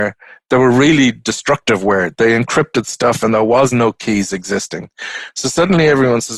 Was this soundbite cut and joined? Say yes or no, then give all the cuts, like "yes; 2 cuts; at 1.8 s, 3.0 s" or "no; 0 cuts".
no; 0 cuts